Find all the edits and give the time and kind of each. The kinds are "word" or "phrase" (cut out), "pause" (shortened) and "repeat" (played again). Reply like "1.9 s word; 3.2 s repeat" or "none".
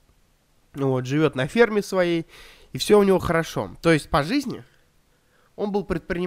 none